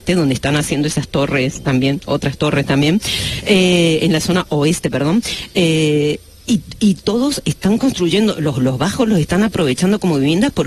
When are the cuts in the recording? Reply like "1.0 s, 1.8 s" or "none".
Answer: none